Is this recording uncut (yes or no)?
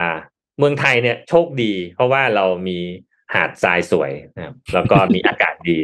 yes